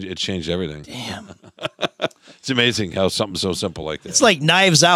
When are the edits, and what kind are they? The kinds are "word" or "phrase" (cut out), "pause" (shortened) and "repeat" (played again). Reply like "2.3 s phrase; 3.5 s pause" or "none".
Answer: none